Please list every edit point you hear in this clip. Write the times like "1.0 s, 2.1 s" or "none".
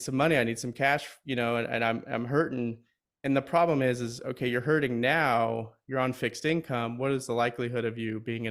none